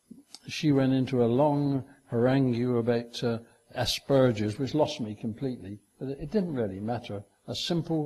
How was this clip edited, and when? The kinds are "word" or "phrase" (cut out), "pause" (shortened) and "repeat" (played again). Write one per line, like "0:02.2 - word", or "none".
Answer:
none